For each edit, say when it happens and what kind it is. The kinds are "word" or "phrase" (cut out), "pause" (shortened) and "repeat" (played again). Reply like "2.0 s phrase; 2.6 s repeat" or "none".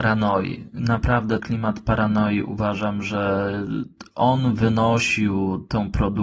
1.4 s word